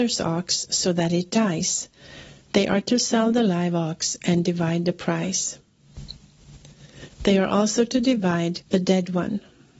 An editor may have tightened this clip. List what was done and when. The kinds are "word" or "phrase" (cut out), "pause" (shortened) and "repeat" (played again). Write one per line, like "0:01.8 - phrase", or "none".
0:08.7 - pause